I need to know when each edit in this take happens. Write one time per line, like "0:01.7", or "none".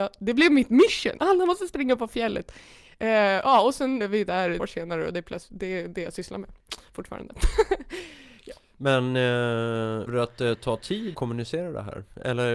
0:04.0
0:04.6
0:10.1
0:11.1